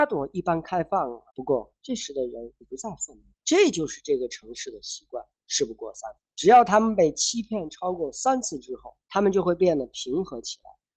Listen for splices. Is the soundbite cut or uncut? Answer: cut